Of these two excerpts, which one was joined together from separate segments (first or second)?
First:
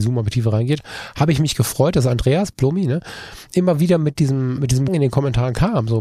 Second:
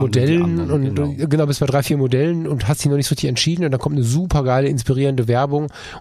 first